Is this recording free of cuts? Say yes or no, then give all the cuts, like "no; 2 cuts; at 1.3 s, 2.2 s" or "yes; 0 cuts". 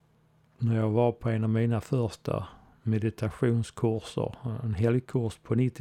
yes; 0 cuts